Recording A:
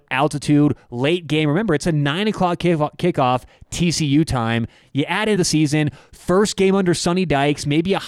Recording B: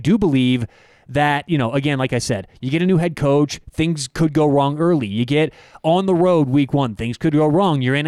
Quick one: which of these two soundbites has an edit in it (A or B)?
A